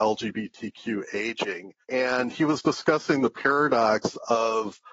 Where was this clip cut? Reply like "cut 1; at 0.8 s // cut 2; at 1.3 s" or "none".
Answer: cut 1; at 1.8 s